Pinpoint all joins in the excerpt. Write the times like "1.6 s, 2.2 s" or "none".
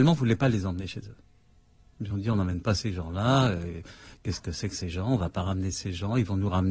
none